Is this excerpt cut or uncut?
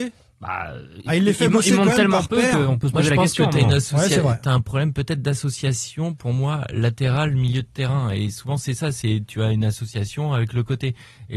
uncut